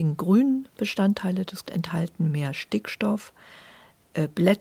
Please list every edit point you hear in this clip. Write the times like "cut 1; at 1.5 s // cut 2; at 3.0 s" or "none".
cut 1; at 1.6 s